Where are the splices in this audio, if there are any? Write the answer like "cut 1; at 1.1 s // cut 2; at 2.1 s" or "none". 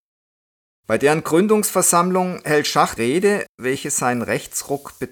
cut 1; at 3.0 s